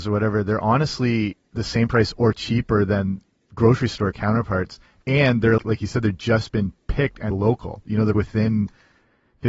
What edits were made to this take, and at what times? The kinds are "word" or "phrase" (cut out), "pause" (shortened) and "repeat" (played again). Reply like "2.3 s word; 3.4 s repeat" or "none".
5.6 s word; 7.3 s word; 8.1 s word